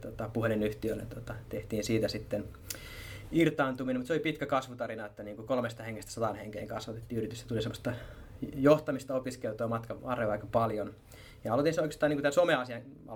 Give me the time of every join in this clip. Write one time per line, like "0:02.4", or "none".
0:01.0
0:10.0